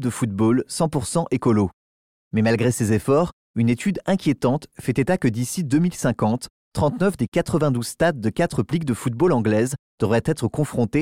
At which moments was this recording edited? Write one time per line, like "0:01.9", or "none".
0:08.7

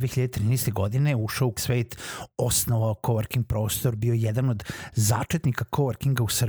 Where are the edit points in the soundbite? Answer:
0:01.6

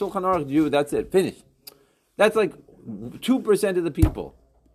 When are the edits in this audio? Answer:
none

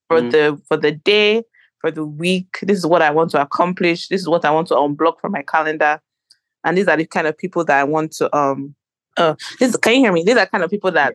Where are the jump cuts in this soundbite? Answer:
none

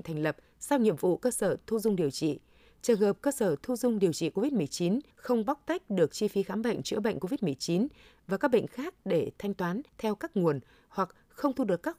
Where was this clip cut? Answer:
0:05.1
0:09.9

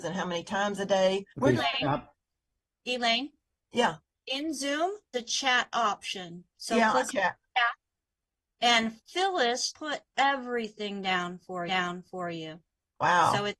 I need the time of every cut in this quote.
0:01.3
0:02.6
0:04.0
0:05.1
0:06.5
0:07.1
0:09.7
0:11.7

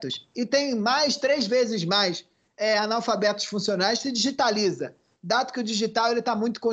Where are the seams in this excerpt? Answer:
none

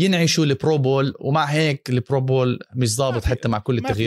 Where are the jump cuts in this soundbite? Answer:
none

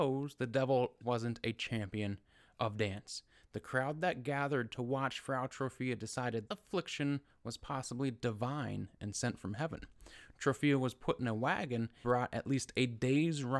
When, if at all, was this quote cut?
0:01.0
0:06.5
0:12.0

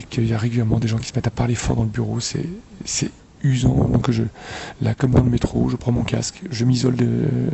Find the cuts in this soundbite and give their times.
none

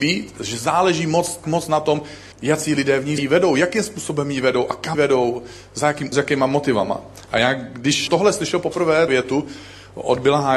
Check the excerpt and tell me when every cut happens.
0:01.4
0:02.3
0:03.2
0:04.9
0:06.1
0:08.1
0:09.1

